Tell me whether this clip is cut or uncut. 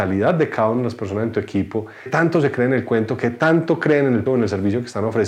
cut